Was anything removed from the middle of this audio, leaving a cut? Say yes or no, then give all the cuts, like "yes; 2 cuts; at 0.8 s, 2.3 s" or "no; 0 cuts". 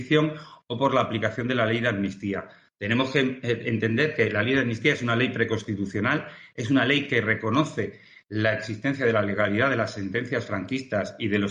no; 0 cuts